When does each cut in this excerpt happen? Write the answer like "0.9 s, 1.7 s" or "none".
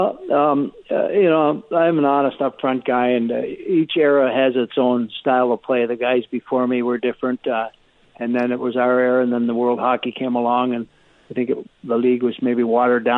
none